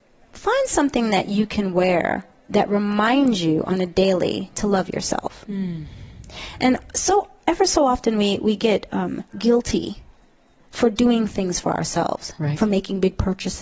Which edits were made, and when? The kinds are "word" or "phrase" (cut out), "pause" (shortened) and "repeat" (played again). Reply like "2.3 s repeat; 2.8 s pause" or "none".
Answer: none